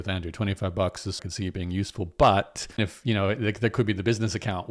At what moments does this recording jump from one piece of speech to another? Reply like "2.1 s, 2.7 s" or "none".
1.2 s, 2.8 s